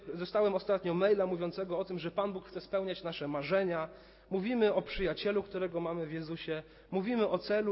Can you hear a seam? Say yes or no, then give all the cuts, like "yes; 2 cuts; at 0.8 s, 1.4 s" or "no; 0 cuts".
no; 0 cuts